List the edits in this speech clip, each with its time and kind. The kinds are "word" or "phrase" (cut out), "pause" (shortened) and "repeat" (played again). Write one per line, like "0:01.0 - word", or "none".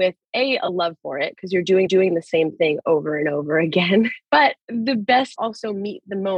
0:01.9 - repeat
0:04.6 - pause
0:05.4 - phrase